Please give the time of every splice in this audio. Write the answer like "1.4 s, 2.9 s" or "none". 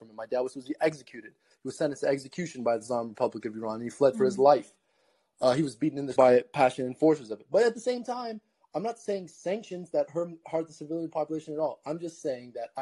6.2 s